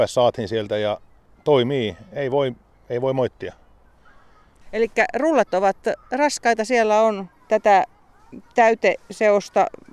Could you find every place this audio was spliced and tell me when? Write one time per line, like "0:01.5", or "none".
none